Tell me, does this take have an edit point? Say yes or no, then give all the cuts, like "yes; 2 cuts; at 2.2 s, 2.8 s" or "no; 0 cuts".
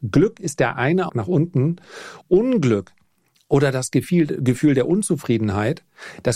yes; 2 cuts; at 1.1 s, 2.2 s